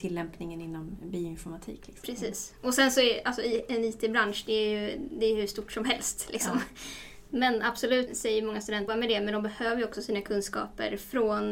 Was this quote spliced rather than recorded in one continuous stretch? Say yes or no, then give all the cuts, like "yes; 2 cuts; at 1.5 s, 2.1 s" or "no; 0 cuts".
yes; 2 cuts; at 8.1 s, 8.9 s